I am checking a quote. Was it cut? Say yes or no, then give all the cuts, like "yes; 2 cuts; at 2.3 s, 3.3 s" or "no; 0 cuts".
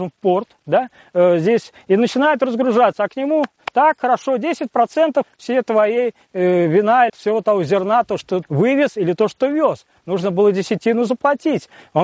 yes; 3 cuts; at 5.2 s, 7.1 s, 8.4 s